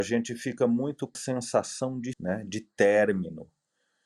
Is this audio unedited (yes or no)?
no